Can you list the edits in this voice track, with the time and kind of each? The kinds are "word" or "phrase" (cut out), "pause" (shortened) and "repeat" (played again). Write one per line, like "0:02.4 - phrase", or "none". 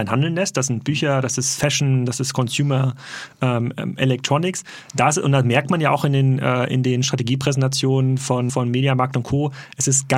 0:08.5 - word